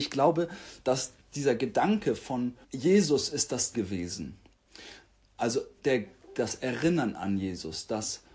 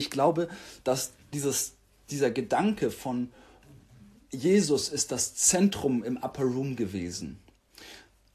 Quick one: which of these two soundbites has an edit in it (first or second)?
first